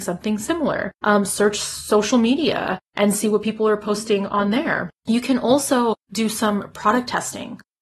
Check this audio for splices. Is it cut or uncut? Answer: cut